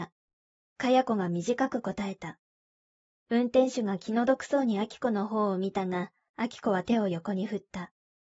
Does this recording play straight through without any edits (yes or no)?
yes